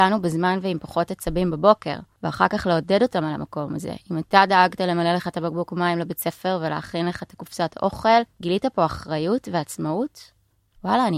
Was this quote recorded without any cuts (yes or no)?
yes